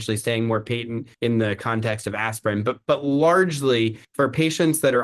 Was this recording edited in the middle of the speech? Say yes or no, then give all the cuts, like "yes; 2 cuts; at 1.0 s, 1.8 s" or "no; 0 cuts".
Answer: yes; 2 cuts; at 1.1 s, 4.0 s